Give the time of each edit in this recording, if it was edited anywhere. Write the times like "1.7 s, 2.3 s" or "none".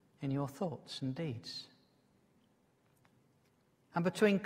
none